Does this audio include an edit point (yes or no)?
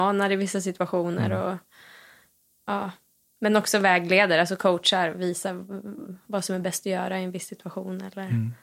no